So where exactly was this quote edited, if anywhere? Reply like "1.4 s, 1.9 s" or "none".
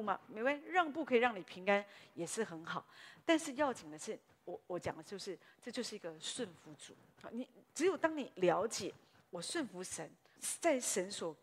10.4 s